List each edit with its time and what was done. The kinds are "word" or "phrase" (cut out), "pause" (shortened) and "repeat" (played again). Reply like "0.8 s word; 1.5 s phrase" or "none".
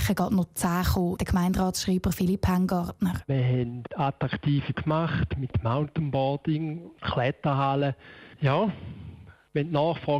1.2 s word; 4.7 s word; 8.3 s pause